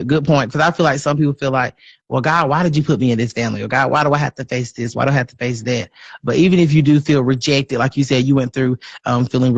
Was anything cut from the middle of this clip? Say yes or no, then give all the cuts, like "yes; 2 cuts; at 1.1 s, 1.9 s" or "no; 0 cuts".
no; 0 cuts